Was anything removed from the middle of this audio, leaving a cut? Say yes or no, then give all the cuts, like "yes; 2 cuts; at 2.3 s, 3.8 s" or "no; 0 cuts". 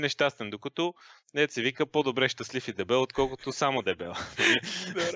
no; 0 cuts